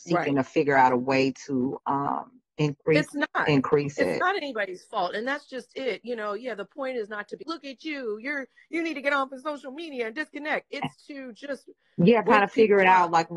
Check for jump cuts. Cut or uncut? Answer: cut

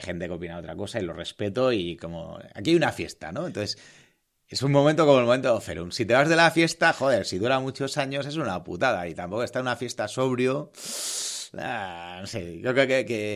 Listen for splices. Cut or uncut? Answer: uncut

